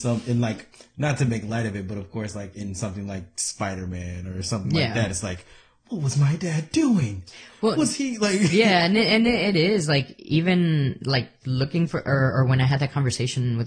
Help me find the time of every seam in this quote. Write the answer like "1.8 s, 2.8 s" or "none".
none